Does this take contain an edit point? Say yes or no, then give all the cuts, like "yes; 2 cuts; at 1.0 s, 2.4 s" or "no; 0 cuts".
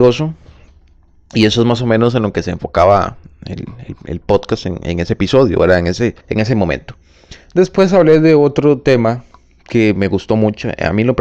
yes; 1 cut; at 6.2 s